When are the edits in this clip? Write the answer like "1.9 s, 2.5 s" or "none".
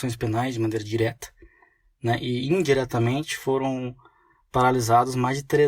none